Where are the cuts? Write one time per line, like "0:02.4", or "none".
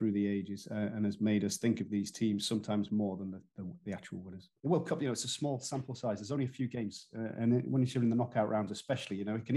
0:04.6